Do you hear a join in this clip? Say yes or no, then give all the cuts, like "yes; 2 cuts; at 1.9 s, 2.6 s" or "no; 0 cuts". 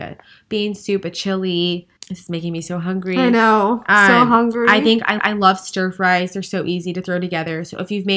yes; 2 cuts; at 2.0 s, 5.2 s